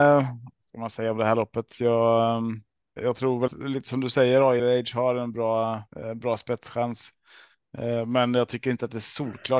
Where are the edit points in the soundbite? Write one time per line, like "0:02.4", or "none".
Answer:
0:03.0
0:03.5
0:04.6
0:05.9